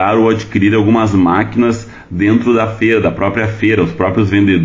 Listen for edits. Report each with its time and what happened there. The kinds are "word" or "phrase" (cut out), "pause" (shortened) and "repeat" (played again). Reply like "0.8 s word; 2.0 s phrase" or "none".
none